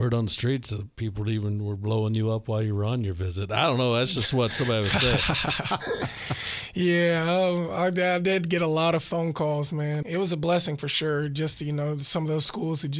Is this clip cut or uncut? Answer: cut